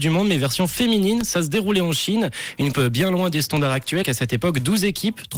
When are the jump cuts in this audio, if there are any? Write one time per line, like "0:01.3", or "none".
0:02.7
0:04.0